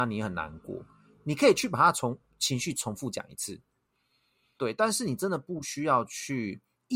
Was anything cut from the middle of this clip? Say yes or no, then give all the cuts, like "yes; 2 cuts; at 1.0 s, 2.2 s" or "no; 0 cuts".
no; 0 cuts